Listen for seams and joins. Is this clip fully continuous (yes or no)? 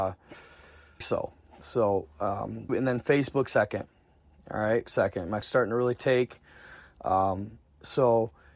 no